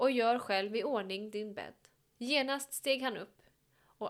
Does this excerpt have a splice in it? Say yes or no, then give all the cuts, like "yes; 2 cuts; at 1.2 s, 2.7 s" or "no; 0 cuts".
no; 0 cuts